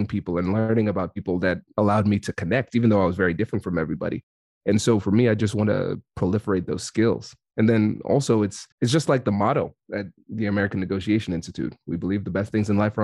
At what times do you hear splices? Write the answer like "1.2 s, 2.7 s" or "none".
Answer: 8.7 s